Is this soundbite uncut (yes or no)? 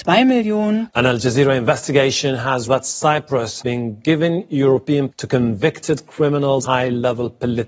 no